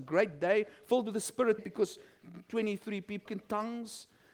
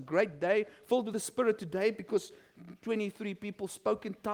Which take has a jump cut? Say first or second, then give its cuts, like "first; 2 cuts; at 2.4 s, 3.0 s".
first; 2 cuts; at 1.6 s, 3.3 s